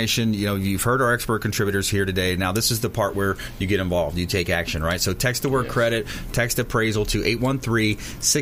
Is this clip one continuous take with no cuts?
yes; 0 cuts

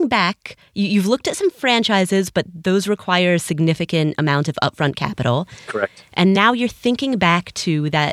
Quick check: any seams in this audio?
no; 0 cuts

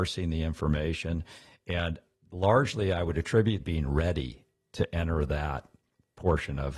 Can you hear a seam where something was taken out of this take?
yes; 1 cut; at 3.6 s

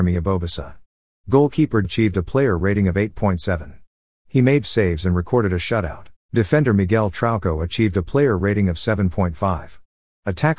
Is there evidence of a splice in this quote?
yes; 3 cuts; at 1.8 s, 4.6 s, 6.2 s

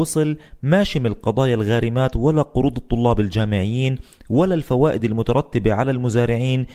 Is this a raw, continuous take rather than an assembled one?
yes; 0 cuts

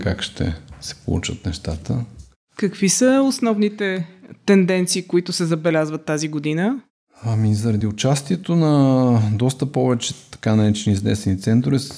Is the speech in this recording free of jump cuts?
yes; 0 cuts

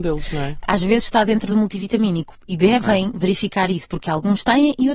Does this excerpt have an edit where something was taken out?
no; 0 cuts

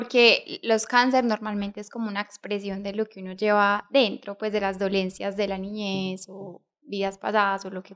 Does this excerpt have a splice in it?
no; 0 cuts

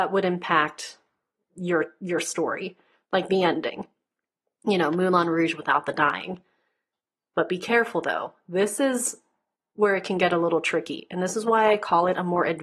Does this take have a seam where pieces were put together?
no; 0 cuts

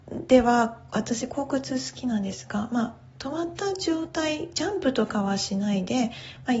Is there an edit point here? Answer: no; 0 cuts

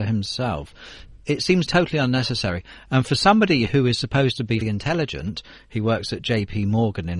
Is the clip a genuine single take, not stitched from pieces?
no; 2 cuts; at 1.7 s, 4.6 s

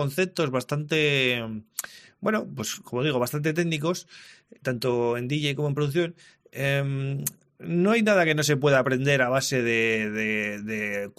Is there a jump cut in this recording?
no; 0 cuts

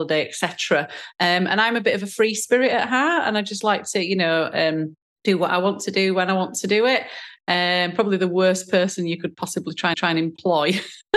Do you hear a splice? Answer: yes; 2 cuts; at 5.0 s, 9.9 s

